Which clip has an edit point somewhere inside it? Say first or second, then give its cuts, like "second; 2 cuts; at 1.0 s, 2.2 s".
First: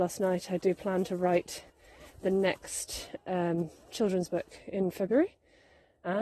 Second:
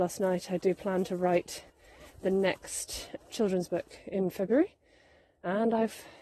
second; 1 cut; at 3.2 s